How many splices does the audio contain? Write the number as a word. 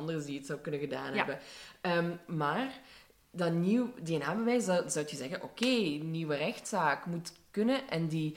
zero